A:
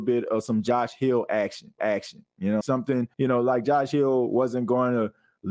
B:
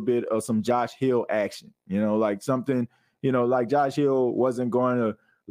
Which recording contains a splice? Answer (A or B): A